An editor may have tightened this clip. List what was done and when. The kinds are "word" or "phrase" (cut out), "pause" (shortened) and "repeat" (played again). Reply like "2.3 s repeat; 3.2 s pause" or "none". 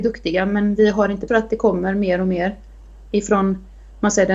1.3 s word

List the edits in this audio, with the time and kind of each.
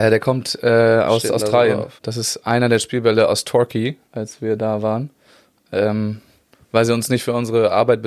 2.0 s pause; 4.0 s pause

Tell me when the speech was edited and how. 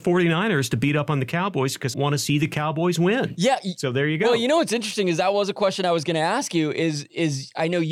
1.9 s phrase

